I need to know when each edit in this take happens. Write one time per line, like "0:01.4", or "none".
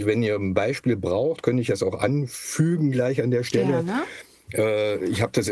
none